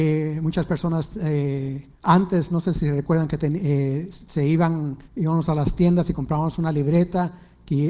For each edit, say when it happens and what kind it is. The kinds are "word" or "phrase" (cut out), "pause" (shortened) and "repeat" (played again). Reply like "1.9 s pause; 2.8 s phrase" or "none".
1.9 s pause; 5.0 s pause

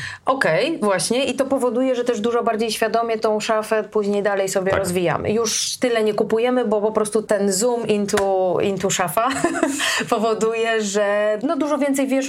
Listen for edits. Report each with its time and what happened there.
none

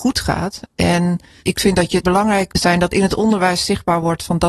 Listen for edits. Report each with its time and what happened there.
1.4 s word; 2.0 s word; 2.5 s word

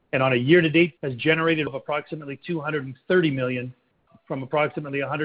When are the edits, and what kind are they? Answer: 1.0 s word; 1.7 s word; 4.1 s word

